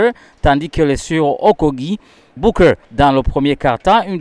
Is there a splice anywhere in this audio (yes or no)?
yes